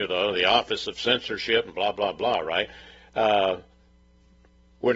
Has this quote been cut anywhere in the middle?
no; 0 cuts

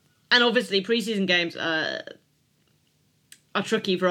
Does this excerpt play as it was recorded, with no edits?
yes; 0 cuts

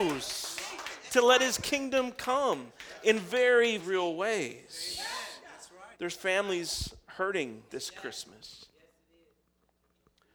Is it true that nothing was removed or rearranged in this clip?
no; 3 cuts; at 3.8 s, 5.9 s, 7.7 s

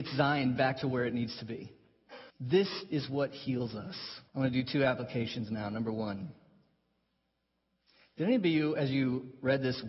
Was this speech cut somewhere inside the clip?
yes; 2 cuts; at 2.3 s, 4.3 s

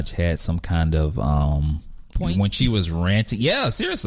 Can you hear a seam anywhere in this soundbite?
no; 0 cuts

